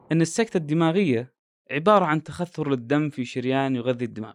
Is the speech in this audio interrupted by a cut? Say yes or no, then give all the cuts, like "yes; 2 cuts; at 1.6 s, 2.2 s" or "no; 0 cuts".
no; 0 cuts